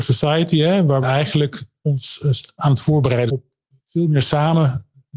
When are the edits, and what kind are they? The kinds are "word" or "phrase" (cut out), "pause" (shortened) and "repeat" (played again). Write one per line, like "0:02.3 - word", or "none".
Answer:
0:01.0 - phrase
0:03.3 - word